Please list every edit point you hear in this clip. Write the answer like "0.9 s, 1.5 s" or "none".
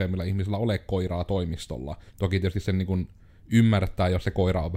2.1 s